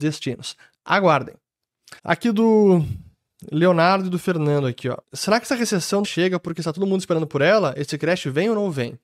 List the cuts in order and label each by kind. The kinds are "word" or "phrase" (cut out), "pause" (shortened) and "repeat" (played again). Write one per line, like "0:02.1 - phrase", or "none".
0:02.0 - pause
0:05.0 - pause
0:06.0 - phrase